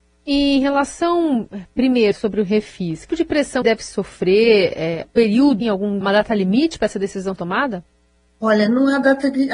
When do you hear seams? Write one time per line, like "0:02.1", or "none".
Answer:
0:02.1
0:03.1
0:03.6
0:05.0
0:05.6
0:06.0
0:07.4